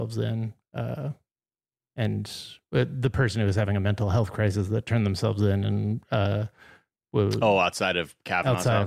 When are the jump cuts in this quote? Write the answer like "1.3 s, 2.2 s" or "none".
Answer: none